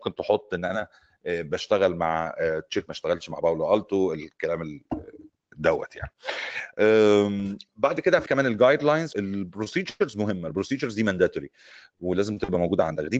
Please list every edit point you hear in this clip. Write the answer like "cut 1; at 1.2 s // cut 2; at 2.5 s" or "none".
cut 1; at 2.9 s // cut 2; at 8.3 s // cut 3; at 9.1 s